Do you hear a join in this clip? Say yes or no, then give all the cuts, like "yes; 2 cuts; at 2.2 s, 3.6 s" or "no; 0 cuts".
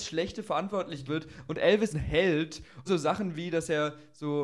yes; 3 cuts; at 1.1 s, 1.9 s, 2.9 s